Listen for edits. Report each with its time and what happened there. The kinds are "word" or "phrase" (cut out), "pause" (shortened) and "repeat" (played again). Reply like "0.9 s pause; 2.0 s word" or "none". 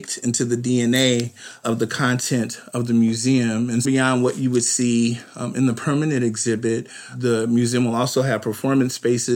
3.8 s phrase